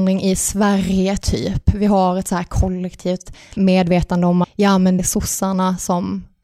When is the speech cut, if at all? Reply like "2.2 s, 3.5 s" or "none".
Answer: 3.6 s, 4.4 s, 5.0 s